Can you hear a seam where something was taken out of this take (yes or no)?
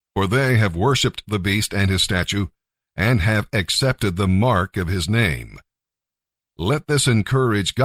no